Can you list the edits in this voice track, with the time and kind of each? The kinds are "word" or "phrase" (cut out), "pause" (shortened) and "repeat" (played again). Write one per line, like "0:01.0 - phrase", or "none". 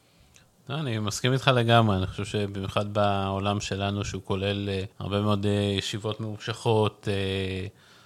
0:04.9 - pause